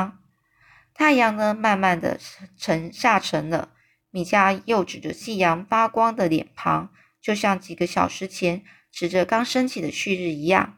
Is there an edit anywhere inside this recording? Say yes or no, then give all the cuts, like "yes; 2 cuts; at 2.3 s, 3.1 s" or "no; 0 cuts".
no; 0 cuts